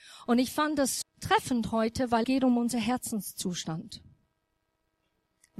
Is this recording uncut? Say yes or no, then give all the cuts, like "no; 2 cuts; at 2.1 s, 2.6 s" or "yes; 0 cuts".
no; 2 cuts; at 1.0 s, 2.2 s